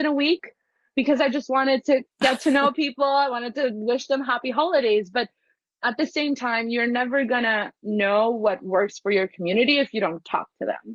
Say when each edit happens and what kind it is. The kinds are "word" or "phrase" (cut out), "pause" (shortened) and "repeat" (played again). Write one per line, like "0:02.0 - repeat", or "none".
none